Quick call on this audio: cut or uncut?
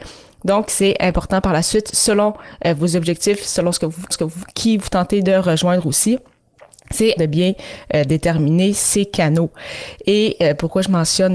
cut